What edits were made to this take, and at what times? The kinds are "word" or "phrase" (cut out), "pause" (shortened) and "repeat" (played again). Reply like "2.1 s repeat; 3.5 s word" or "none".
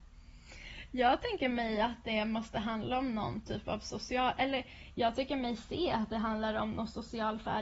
none